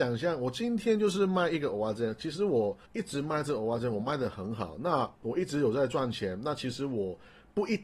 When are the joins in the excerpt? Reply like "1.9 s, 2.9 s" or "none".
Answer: 2.8 s, 5.1 s